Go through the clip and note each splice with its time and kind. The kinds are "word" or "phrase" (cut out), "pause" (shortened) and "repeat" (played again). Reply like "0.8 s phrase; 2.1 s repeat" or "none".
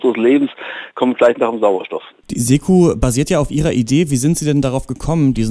none